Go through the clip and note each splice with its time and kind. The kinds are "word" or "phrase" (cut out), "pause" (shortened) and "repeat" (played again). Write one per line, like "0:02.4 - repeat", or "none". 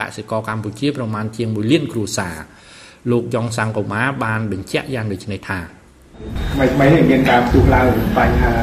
none